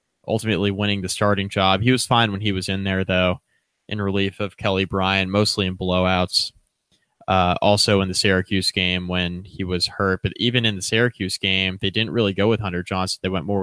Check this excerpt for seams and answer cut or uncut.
uncut